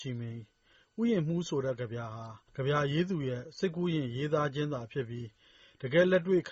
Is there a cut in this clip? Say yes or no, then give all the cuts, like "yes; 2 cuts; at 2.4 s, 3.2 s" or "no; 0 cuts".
yes; 1 cut; at 2.5 s